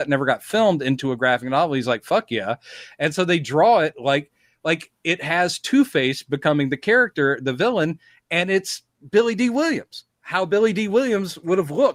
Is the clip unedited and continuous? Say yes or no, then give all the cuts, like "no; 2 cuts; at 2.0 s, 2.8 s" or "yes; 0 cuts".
yes; 0 cuts